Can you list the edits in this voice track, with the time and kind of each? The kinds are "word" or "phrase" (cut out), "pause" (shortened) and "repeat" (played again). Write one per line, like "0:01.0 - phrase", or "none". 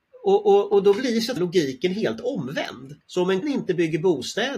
0:01.4 - word
0:03.0 - pause
0:03.4 - word